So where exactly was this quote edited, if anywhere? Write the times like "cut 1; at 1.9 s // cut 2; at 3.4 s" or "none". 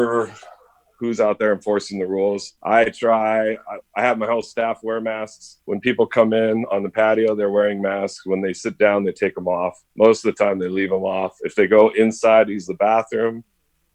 cut 1; at 2.6 s // cut 2; at 5.6 s // cut 3; at 9.9 s